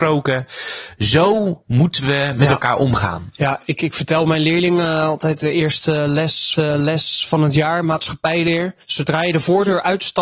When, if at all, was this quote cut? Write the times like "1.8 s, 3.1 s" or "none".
6.6 s, 8.8 s